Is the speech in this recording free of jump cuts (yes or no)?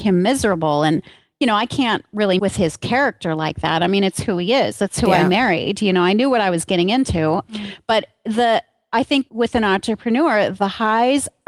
no